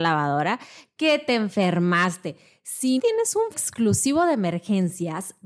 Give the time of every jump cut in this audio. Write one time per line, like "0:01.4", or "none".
0:03.0
0:03.5